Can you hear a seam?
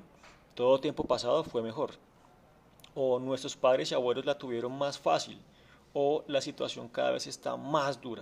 no; 0 cuts

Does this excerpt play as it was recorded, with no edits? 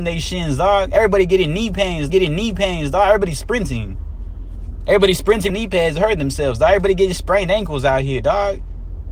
no; 2 cuts; at 2.1 s, 5.5 s

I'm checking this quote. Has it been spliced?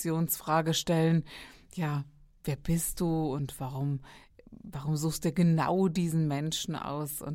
no; 0 cuts

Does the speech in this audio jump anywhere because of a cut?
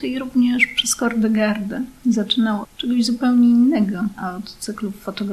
yes; 1 cut; at 2.6 s

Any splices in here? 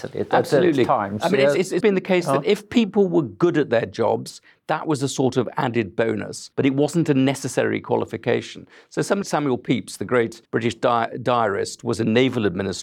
yes; 4 cuts; at 1.8 s, 6.5 s, 9.2 s, 10.5 s

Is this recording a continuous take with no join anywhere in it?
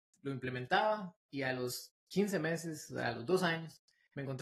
no; 1 cut; at 2.0 s

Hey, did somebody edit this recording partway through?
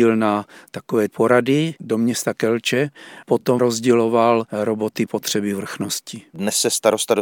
yes; 4 cuts; at 1.1 s, 3.2 s, 3.6 s, 5.1 s

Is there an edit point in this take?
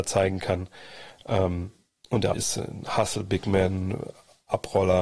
yes; 2 cuts; at 1.9 s, 2.3 s

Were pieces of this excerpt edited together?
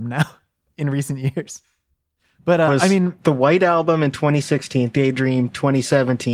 yes; 3 cuts; at 2.7 s, 3.2 s, 4.9 s

